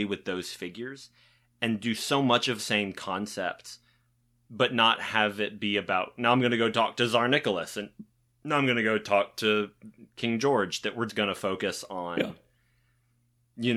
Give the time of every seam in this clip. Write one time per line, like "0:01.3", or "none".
0:02.6
0:11.1